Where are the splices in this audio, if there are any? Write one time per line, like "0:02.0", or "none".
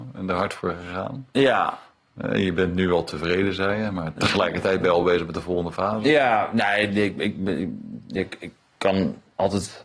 none